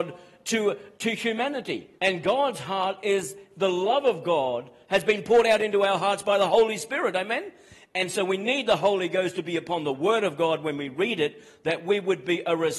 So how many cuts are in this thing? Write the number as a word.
one